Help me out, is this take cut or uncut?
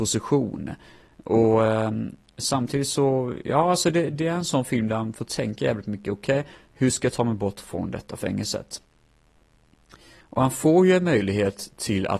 uncut